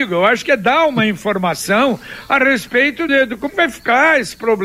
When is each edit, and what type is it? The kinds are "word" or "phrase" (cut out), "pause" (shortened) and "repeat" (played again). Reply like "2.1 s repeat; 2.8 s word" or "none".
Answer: 3.1 s word; 3.5 s word